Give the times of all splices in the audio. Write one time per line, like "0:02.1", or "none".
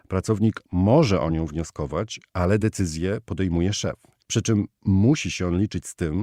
none